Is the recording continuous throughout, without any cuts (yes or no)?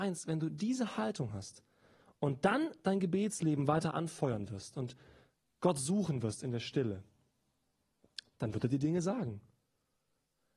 yes